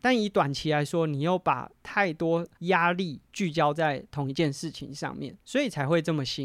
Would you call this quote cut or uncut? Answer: cut